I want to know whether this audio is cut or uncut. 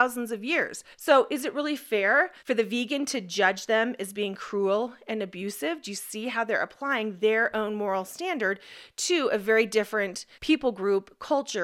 cut